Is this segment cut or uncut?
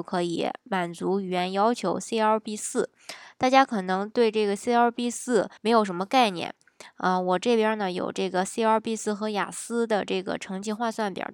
cut